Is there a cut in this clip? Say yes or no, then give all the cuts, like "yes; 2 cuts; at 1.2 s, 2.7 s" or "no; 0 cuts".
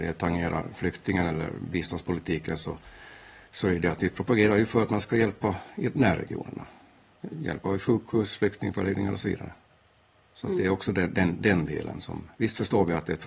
no; 0 cuts